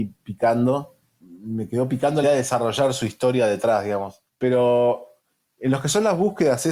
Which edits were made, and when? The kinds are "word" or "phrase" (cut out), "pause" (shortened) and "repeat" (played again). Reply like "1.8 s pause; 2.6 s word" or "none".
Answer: 2.2 s word; 4.3 s pause